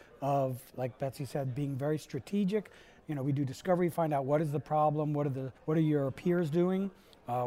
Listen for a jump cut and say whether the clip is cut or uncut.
cut